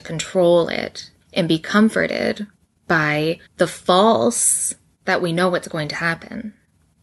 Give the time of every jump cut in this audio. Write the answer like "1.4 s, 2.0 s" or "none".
1.2 s, 3.5 s, 5.0 s